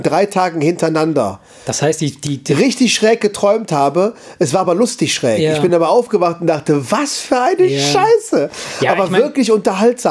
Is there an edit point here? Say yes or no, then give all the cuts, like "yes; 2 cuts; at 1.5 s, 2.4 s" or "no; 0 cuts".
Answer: no; 0 cuts